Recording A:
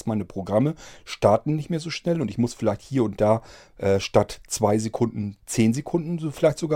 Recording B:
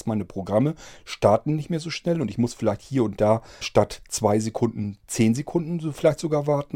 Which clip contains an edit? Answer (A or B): B